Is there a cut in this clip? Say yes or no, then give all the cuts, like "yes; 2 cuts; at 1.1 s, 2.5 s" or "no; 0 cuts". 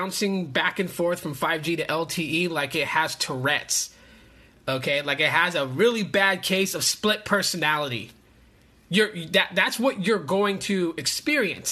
no; 0 cuts